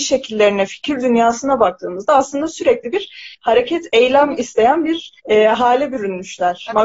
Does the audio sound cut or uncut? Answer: cut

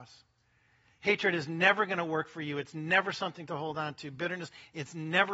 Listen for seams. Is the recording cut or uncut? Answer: uncut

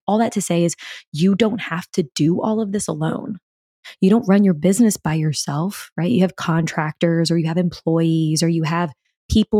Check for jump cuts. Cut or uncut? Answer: uncut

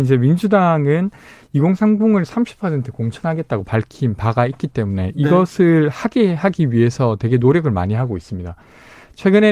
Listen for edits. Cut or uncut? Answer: uncut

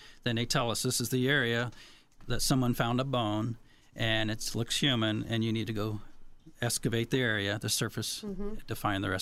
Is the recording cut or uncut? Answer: uncut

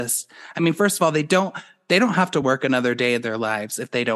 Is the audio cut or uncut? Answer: uncut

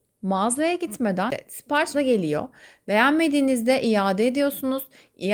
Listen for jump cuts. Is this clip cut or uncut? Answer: cut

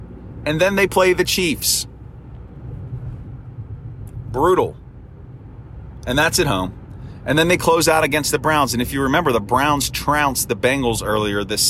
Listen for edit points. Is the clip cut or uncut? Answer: uncut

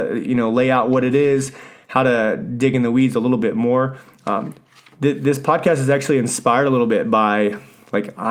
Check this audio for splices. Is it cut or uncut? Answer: uncut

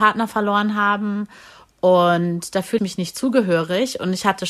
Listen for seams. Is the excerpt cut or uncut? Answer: cut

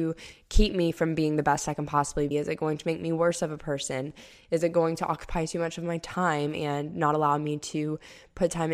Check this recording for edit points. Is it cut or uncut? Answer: cut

